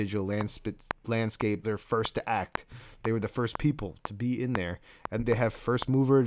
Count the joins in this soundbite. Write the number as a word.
two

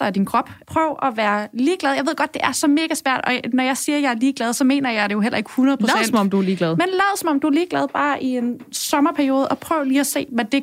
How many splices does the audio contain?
zero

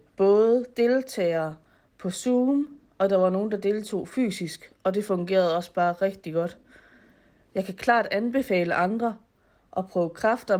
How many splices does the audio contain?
zero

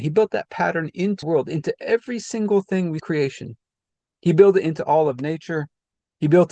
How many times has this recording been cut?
three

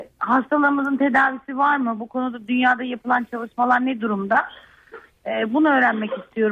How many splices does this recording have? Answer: zero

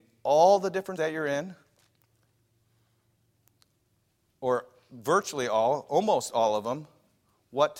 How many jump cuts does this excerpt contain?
one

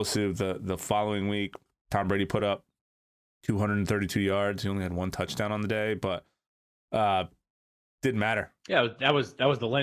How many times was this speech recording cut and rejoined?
zero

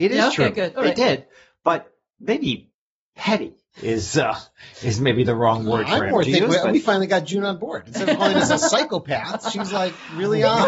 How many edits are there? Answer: one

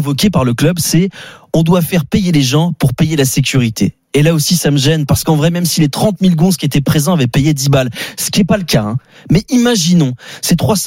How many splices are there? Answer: zero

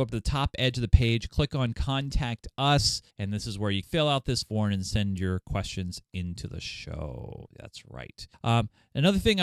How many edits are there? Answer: four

